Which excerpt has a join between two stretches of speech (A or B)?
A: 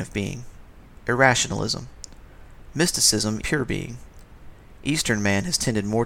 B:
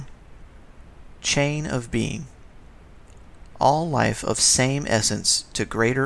A